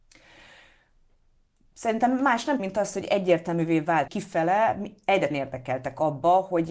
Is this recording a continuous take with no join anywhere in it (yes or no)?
no